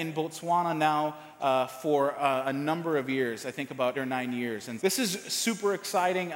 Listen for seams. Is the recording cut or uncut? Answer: cut